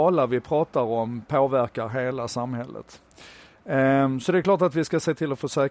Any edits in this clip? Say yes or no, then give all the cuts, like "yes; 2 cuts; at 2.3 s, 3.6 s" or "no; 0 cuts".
no; 0 cuts